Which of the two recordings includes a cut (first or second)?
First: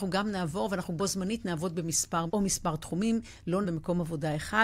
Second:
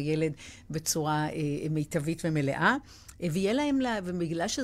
first